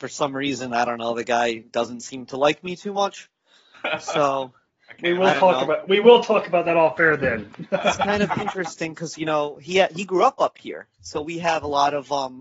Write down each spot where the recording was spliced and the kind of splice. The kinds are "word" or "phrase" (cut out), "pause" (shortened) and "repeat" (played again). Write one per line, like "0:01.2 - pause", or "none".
none